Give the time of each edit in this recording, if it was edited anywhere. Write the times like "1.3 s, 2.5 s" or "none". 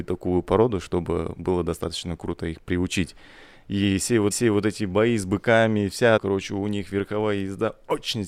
1.4 s, 4.3 s, 6.2 s